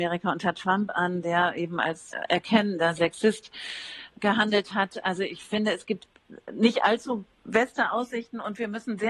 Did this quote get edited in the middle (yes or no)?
no